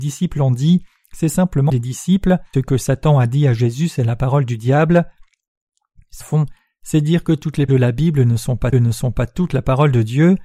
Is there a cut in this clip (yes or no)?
yes